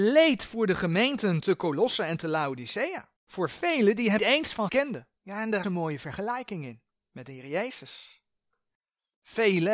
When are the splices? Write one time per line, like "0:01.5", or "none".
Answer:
0:03.2
0:04.2
0:04.7
0:05.2
0:05.6
0:06.9